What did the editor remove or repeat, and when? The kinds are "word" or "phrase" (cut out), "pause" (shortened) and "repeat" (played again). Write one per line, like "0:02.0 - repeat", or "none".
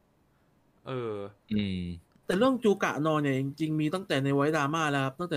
0:01.4 - pause